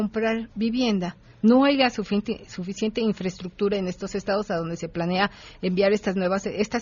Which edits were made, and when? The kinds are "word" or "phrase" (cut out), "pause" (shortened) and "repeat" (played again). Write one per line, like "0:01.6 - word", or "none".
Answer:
none